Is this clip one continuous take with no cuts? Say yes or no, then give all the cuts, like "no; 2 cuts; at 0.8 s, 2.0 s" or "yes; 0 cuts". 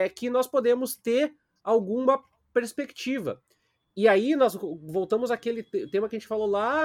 yes; 0 cuts